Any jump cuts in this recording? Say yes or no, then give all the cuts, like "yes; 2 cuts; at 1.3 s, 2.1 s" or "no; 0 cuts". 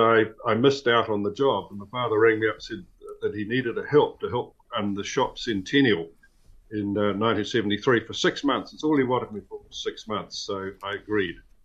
no; 0 cuts